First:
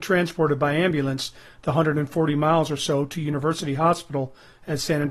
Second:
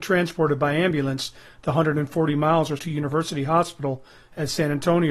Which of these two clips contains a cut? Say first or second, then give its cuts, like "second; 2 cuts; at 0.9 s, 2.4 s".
second; 1 cut; at 2.8 s